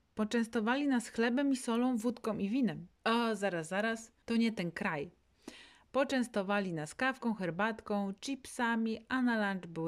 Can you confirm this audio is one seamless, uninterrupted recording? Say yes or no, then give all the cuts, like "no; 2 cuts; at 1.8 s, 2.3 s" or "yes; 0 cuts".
no; 2 cuts; at 3.0 s, 4.2 s